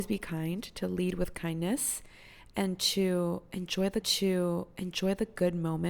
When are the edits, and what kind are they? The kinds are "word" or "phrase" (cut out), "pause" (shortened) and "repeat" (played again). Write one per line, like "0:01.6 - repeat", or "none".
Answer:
0:04.0 - repeat